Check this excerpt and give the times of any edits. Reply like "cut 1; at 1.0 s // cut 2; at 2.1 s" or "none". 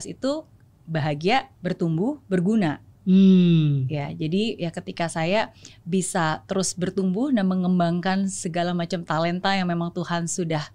cut 1; at 1.5 s